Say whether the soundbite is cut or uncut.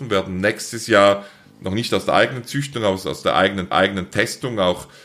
cut